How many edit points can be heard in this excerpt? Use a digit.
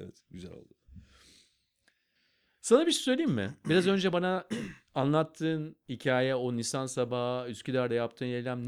0